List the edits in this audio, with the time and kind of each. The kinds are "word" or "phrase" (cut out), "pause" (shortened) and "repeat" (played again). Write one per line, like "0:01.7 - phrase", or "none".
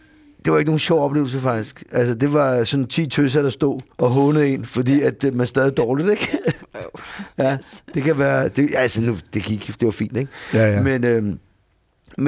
0:03.9 - pause